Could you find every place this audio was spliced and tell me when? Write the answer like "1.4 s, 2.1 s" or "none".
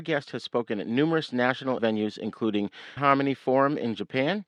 1.8 s, 3.0 s